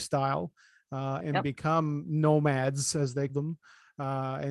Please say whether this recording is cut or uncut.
cut